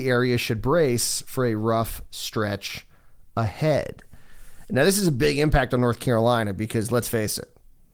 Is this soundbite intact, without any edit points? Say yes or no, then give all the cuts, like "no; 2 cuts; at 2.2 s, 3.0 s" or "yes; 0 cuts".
yes; 0 cuts